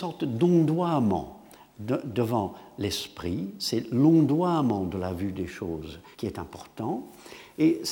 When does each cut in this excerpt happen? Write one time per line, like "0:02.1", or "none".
0:06.1